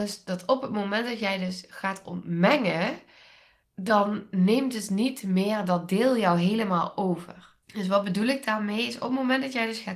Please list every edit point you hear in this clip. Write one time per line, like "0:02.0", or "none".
0:03.6
0:07.6